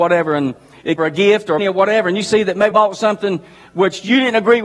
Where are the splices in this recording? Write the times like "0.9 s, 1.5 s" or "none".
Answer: 1.0 s, 1.6 s, 2.7 s